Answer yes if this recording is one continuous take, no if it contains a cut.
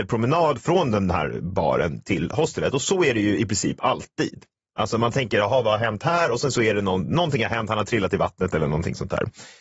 yes